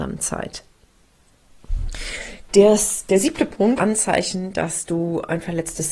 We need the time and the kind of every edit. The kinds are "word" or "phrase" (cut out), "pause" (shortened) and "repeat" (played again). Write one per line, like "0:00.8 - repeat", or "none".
0:03.8 - phrase